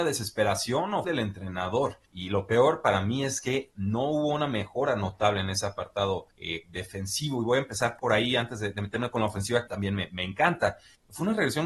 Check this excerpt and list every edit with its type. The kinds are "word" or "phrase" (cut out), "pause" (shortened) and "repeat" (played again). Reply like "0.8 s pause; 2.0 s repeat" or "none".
1.0 s word; 2.0 s pause; 6.3 s pause; 9.7 s phrase